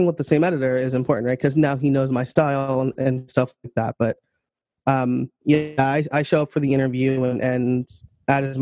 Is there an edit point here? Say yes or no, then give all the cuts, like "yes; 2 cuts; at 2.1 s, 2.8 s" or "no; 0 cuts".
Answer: yes; 1 cut; at 5.3 s